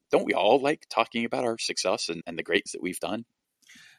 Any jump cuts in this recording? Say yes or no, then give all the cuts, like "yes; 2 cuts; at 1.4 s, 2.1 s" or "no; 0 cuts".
yes; 2 cuts; at 2.2 s, 2.7 s